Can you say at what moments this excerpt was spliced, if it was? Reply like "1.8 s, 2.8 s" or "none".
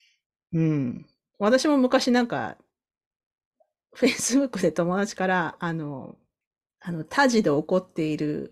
none